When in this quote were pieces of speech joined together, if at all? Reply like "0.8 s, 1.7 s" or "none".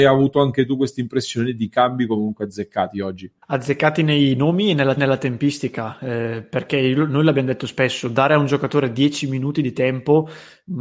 3.4 s, 5.0 s